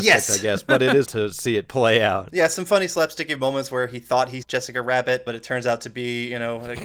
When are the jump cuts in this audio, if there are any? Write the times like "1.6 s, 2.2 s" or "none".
1.1 s, 4.4 s